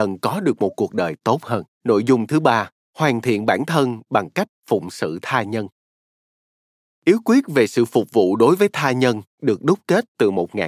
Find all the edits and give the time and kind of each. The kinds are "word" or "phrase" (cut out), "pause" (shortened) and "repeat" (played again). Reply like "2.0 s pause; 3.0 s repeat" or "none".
1.7 s pause; 2.8 s pause

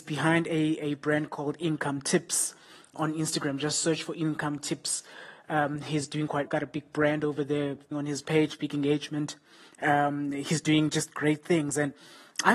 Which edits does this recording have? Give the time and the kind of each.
2.9 s word; 6.5 s word; 7.9 s phrase

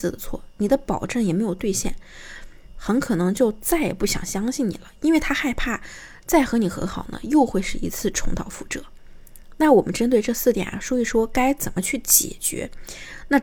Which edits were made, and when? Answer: 2.7 s phrase

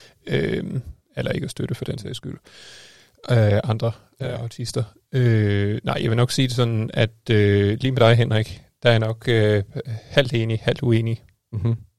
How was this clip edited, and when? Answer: none

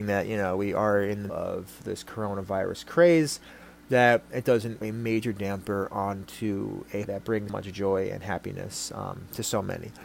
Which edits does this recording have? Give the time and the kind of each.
1.3 s word; 4.8 s word; 7.0 s word; 7.5 s word

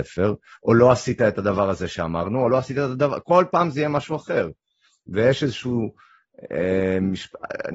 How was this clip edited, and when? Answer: none

